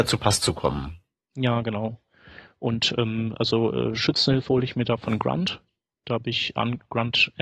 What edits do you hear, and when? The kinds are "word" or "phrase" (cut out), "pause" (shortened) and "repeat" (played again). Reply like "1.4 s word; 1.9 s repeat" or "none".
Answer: none